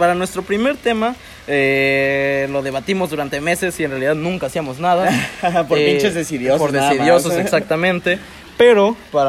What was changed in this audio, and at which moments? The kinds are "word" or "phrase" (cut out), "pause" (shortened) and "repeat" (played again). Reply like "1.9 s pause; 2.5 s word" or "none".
none